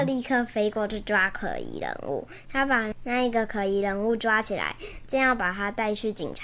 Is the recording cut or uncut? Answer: cut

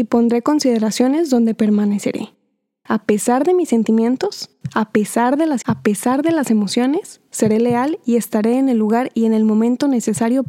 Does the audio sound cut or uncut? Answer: cut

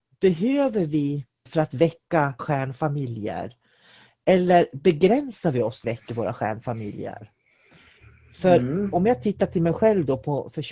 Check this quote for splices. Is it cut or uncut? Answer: cut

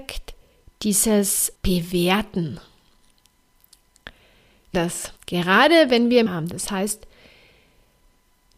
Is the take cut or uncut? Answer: cut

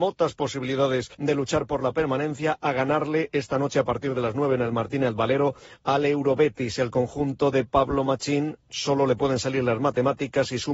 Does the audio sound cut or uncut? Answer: cut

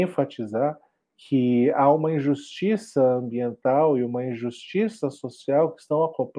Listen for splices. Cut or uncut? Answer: uncut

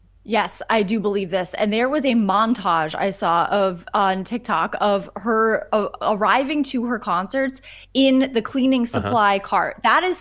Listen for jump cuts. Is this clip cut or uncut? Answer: uncut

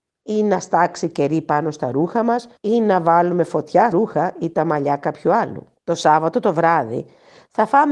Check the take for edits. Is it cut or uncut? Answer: cut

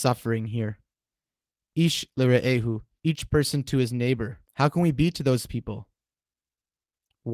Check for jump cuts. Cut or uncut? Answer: cut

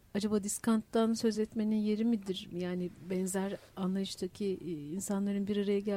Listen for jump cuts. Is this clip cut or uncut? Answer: uncut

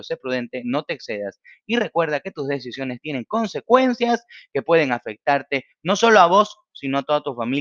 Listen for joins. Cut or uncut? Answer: uncut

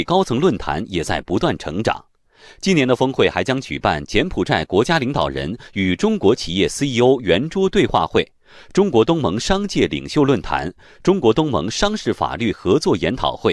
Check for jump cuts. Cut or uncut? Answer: uncut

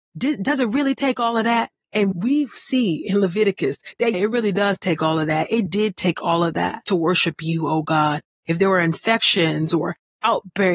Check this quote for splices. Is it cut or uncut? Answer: cut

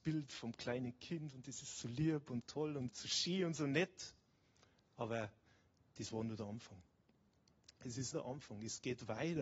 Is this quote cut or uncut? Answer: cut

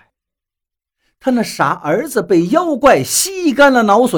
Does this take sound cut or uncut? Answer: uncut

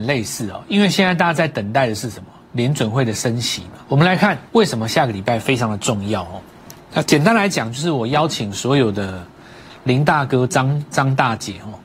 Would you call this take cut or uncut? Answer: cut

